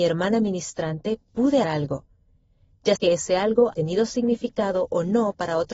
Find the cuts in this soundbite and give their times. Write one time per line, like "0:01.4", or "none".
0:01.6
0:03.0
0:03.7